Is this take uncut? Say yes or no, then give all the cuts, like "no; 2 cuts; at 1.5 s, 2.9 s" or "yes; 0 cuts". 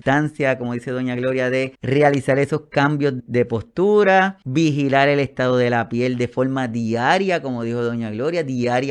no; 3 cuts; at 1.7 s, 3.2 s, 4.4 s